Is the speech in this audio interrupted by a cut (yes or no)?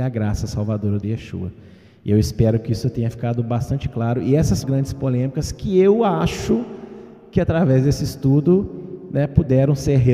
yes